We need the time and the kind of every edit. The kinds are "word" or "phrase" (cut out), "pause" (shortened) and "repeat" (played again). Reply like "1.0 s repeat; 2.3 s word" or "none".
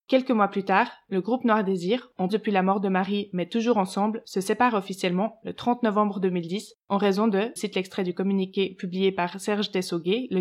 2.3 s word; 7.6 s word